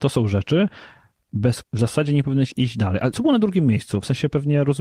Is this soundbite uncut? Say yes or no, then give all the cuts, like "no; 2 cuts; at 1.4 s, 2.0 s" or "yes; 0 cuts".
no; 3 cuts; at 1.6 s, 2.5 s, 3.1 s